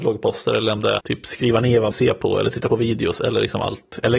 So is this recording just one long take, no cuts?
no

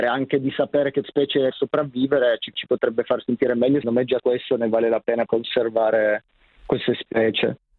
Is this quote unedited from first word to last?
no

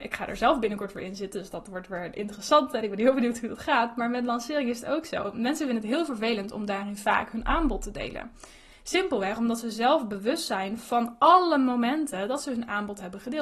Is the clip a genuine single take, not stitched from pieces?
yes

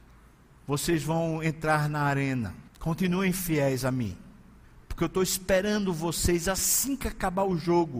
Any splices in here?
yes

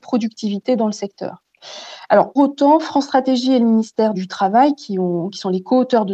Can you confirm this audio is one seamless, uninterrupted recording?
no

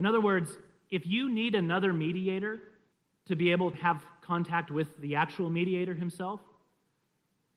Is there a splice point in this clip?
yes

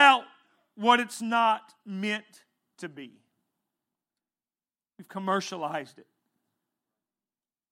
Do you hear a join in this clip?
no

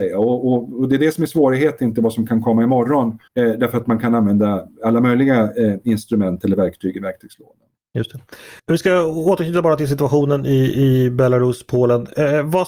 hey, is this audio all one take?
no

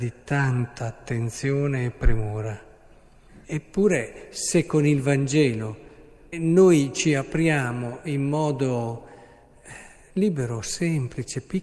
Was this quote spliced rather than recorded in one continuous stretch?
yes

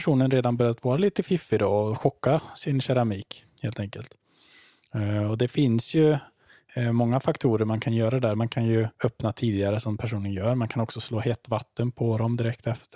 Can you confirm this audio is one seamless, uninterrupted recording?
no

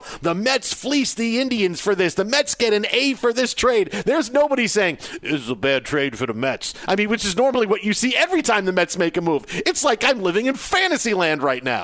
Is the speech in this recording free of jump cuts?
yes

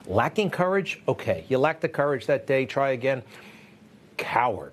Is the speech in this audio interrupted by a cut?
no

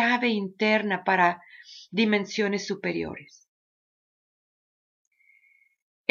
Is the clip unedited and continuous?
yes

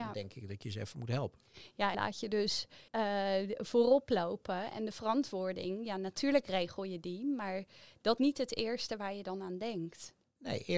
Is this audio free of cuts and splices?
no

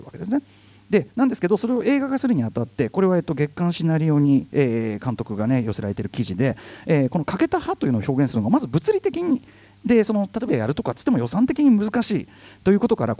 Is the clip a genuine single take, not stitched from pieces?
no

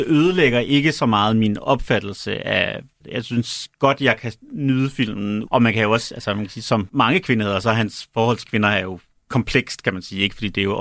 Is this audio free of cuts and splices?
yes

